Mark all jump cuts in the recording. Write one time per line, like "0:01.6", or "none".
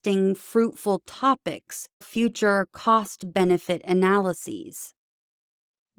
0:02.0